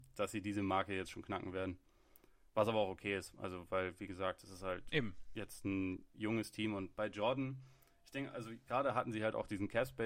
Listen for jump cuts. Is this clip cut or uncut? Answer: cut